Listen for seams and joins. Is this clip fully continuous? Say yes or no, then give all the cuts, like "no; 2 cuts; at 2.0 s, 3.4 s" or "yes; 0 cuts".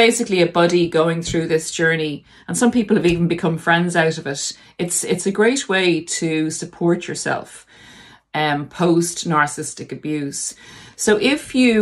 yes; 0 cuts